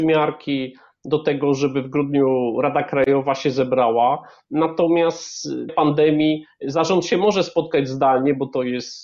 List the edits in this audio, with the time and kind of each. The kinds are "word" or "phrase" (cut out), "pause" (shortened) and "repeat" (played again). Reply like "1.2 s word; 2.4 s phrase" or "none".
5.7 s phrase